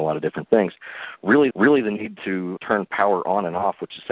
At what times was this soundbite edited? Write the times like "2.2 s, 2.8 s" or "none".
1.5 s, 2.6 s